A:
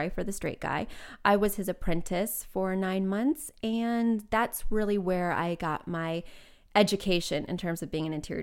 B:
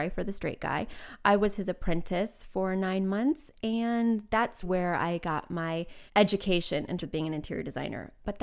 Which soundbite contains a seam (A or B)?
B